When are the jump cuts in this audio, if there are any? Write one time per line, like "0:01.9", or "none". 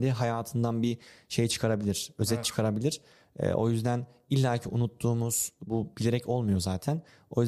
none